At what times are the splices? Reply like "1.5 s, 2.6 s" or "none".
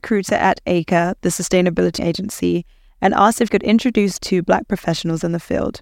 2.0 s, 3.5 s, 4.2 s